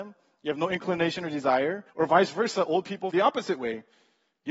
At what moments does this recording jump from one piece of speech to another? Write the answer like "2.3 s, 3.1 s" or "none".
1.9 s, 3.1 s